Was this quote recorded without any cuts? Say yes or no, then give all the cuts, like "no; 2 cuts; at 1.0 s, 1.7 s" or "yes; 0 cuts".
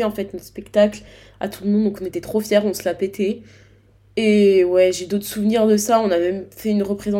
yes; 0 cuts